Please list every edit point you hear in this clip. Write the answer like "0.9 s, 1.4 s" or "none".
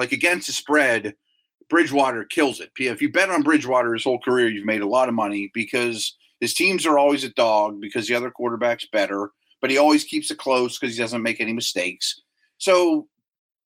none